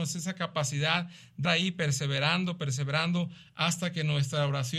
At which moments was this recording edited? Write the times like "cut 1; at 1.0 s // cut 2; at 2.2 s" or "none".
cut 1; at 1.4 s